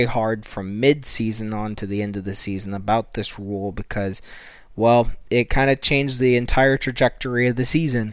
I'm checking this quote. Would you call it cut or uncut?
uncut